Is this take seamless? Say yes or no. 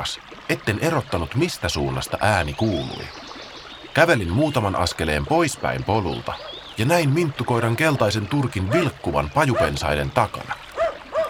yes